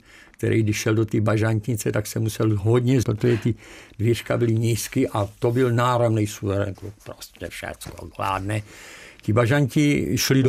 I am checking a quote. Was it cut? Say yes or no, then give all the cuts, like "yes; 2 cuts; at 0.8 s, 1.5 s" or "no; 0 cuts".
yes; 2 cuts; at 3.0 s, 6.7 s